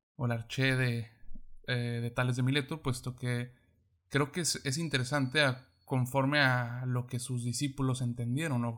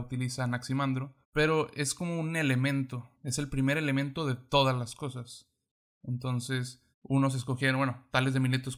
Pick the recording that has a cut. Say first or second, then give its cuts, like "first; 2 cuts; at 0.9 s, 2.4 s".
second; 3 cuts; at 1.2 s, 3.1 s, 6.9 s